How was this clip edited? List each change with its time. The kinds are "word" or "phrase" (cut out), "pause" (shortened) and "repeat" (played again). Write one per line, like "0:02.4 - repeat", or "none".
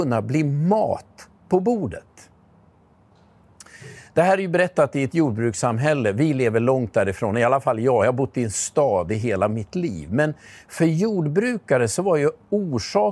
none

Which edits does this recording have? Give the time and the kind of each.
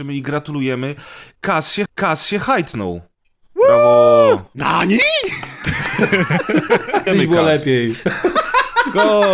0:01.9 - repeat
0:07.1 - word

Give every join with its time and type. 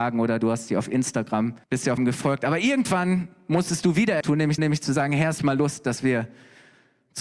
0:01.6 - pause
0:02.0 - word
0:04.2 - word
0:04.6 - repeat
0:05.4 - word

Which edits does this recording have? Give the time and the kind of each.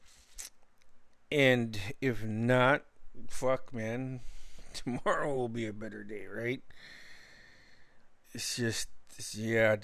none

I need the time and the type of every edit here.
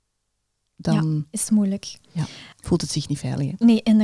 0:02.5 - pause

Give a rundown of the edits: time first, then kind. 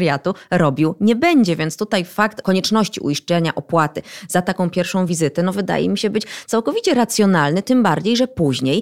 none

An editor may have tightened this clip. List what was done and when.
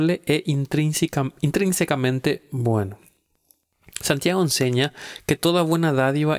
none

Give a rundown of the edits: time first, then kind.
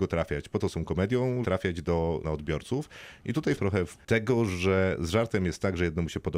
0:01.4 - word
0:02.2 - phrase
0:03.6 - word
0:04.0 - word

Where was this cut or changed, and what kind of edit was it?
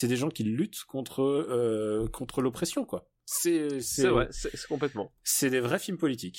none

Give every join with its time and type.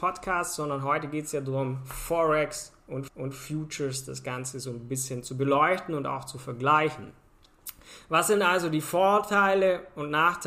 0:03.1 - repeat

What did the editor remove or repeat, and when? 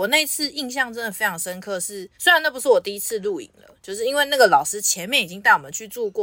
0:02.1 - pause

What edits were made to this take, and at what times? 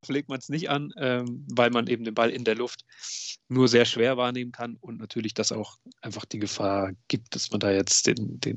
none

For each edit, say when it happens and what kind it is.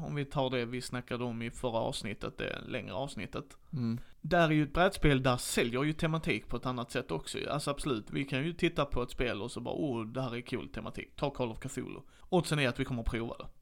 none

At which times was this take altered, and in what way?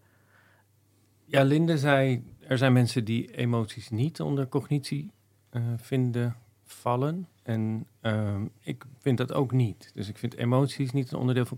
0:02.4 - pause
0:07.4 - pause
0:09.0 - pause

